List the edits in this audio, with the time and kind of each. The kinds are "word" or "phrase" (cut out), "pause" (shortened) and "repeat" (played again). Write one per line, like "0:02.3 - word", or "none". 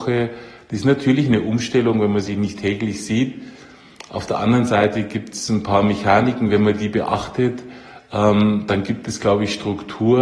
none